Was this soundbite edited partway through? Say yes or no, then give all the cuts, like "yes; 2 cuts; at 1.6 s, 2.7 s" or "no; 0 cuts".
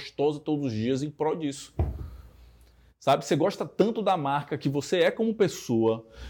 no; 0 cuts